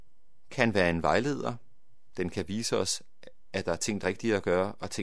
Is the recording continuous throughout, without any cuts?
no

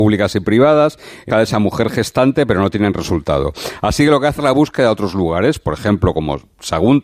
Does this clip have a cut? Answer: yes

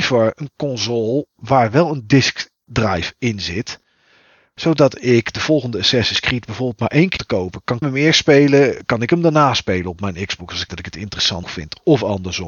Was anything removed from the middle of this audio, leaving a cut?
yes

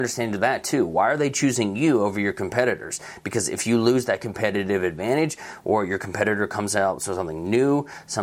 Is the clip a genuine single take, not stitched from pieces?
yes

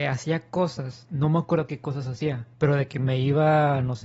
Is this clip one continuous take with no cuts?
no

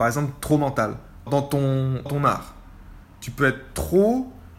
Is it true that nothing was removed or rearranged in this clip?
no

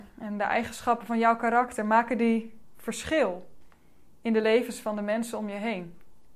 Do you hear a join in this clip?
no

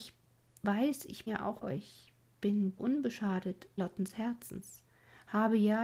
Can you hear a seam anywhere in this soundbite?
yes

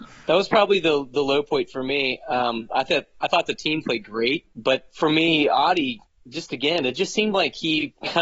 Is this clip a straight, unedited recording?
yes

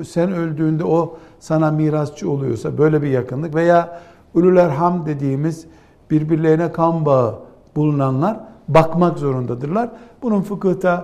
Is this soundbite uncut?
yes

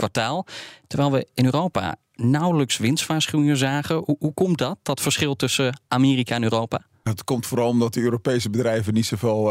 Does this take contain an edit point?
no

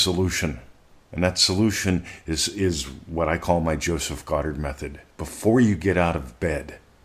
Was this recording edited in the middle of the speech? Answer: no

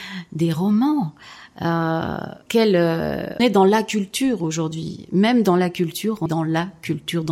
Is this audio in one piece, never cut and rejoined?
no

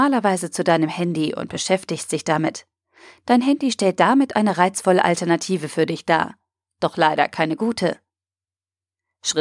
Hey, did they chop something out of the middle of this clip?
no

